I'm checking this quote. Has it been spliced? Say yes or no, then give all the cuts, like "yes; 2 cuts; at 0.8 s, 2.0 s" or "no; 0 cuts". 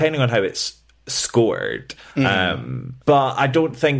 yes; 1 cut; at 3.0 s